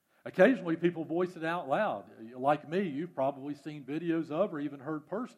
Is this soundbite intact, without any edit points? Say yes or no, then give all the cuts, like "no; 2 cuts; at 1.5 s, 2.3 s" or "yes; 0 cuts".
yes; 0 cuts